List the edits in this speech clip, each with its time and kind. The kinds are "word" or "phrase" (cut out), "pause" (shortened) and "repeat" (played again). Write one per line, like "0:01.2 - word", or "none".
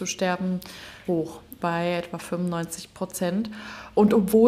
0:01.1 - word
0:01.6 - word